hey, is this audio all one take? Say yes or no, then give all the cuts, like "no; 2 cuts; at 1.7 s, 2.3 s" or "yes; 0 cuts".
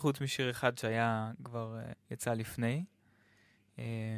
no; 1 cut; at 1.9 s